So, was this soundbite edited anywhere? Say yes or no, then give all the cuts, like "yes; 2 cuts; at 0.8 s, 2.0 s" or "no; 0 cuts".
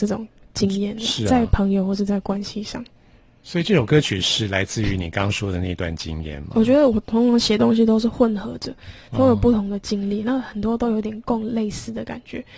no; 0 cuts